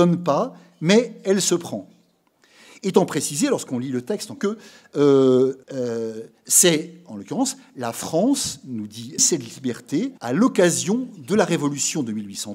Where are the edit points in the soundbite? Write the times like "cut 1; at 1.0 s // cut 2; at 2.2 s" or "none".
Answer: cut 1; at 4.4 s // cut 2; at 5.6 s // cut 3; at 9.2 s // cut 4; at 10.2 s